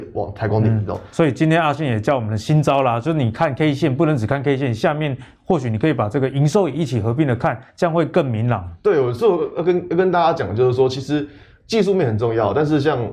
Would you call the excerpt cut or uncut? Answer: uncut